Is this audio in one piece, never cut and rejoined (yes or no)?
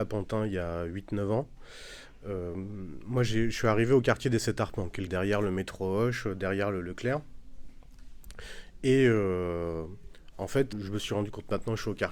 no